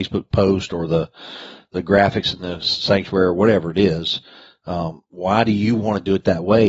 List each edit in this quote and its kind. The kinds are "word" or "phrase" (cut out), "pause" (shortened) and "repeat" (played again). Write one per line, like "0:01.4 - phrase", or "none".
none